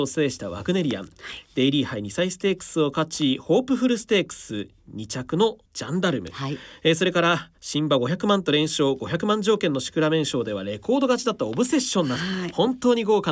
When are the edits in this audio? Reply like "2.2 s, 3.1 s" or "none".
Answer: 5.7 s, 7.6 s